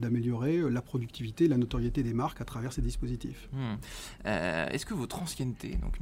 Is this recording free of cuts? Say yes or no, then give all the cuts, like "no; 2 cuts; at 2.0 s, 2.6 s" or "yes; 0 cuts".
yes; 0 cuts